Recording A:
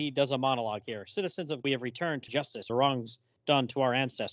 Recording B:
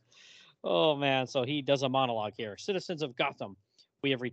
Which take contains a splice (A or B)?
A